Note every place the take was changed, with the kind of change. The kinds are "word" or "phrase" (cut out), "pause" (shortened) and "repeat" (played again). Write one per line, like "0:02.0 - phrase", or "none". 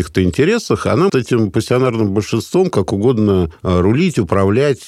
0:01.1 - word